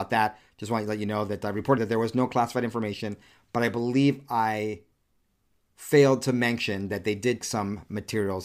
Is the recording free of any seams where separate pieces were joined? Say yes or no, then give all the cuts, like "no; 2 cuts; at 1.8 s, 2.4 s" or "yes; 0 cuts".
no; 2 cuts; at 1.8 s, 7.4 s